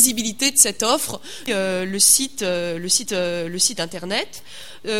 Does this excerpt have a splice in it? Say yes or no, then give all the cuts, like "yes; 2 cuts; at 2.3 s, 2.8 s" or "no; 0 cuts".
yes; 2 cuts; at 1.5 s, 3.1 s